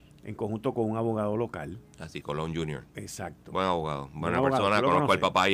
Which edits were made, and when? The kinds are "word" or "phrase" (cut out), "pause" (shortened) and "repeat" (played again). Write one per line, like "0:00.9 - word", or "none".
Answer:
0:02.2 - word

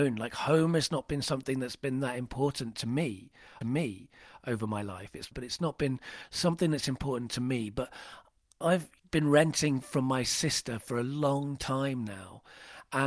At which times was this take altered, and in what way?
0:03.6 - repeat
0:05.3 - phrase
0:09.0 - pause

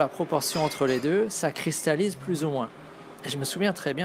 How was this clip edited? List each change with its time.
none

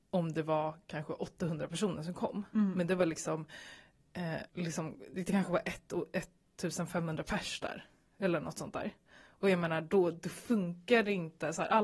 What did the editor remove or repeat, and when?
0:04.5 - pause

